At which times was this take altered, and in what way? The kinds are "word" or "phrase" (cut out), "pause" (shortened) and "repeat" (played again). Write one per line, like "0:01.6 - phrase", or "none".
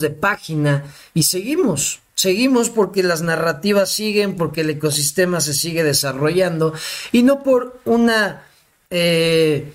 0:02.1 - pause